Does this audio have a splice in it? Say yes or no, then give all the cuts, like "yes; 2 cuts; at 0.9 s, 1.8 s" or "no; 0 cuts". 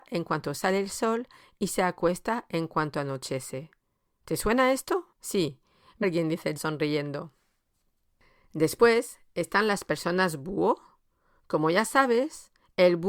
yes; 3 cuts; at 5.1 s, 6.0 s, 6.6 s